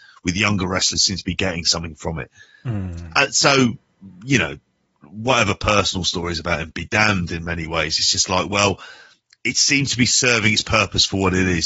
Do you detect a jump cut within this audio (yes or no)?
no